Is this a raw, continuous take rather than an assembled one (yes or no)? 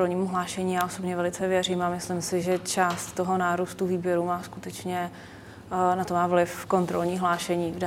yes